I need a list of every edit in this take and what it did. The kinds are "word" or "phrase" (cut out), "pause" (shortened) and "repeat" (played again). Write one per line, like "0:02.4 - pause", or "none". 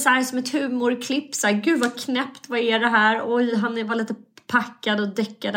none